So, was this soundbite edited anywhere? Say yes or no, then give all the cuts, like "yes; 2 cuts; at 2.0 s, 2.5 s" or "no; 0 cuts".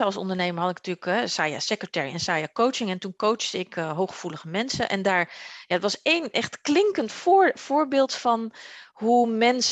no; 0 cuts